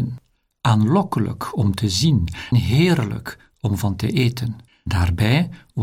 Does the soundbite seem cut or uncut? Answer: cut